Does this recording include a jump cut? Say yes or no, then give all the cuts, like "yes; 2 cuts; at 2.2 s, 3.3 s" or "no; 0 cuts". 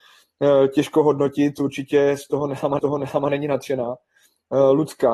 yes; 1 cut; at 2.8 s